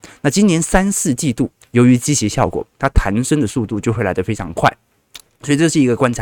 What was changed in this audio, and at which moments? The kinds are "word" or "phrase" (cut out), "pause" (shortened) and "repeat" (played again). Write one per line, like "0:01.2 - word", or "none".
none